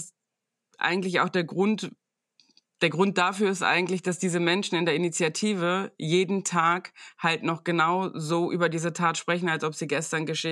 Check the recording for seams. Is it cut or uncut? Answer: uncut